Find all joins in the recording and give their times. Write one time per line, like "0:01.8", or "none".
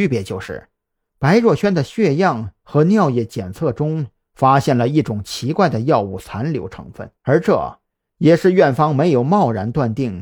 0:07.2